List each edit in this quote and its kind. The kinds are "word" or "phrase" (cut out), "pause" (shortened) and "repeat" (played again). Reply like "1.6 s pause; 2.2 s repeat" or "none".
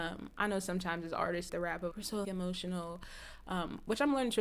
1.5 s phrase; 1.9 s word; 2.2 s word